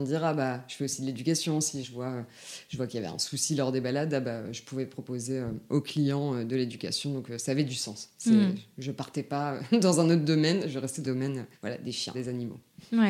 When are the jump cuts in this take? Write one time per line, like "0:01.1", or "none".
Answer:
0:01.8
0:11.0
0:11.6
0:12.1